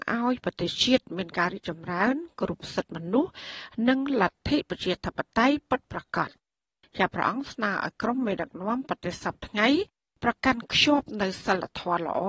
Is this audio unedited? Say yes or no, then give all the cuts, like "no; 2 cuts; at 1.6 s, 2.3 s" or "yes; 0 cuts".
yes; 0 cuts